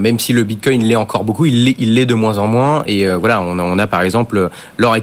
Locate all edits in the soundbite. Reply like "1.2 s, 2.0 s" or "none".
none